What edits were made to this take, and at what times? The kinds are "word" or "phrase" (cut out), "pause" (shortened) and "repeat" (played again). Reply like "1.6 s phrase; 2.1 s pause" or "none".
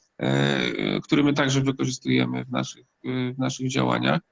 none